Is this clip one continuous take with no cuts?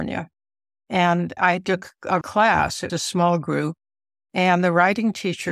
no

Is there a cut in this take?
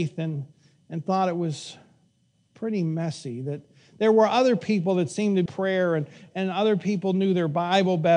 yes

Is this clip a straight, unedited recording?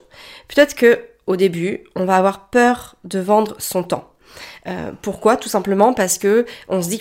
yes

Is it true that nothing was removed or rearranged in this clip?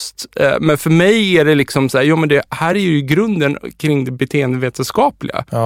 yes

